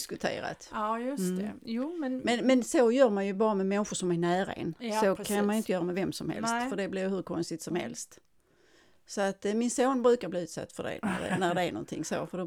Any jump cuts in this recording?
no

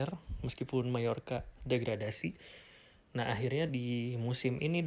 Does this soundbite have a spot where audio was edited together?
no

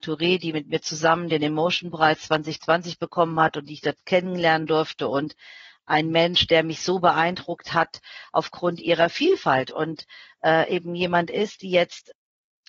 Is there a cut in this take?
no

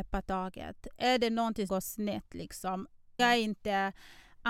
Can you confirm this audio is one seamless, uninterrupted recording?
no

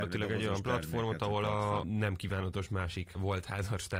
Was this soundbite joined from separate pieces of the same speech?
no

